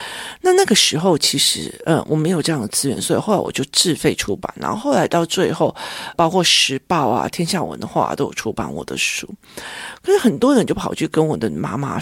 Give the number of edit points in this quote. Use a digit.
1